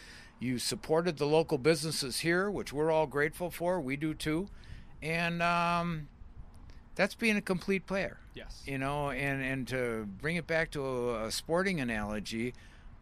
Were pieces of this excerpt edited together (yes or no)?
no